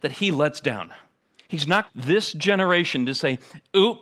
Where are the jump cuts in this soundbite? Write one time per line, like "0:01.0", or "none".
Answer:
0:01.2
0:01.9